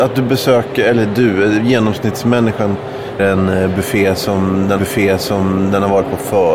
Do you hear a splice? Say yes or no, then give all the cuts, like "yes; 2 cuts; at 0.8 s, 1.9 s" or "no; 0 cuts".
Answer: yes; 2 cuts; at 3.2 s, 4.8 s